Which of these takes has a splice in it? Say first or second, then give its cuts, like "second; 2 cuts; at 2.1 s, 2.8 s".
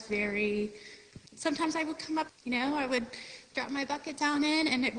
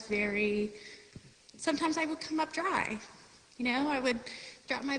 first; 2 cuts; at 1.3 s, 2.3 s